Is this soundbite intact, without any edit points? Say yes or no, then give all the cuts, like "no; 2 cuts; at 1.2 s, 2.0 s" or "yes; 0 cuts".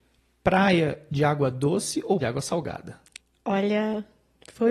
no; 2 cuts; at 2.2 s, 3.2 s